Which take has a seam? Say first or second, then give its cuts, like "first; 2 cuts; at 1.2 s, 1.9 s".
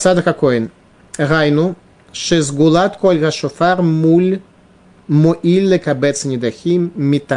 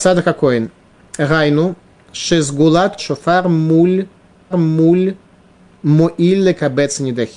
second; 2 cuts; at 3.0 s, 4.5 s